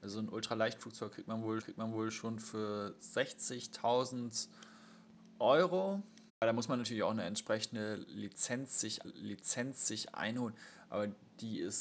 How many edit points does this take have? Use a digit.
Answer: 3